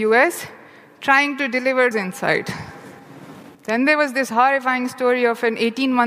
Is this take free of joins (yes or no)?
no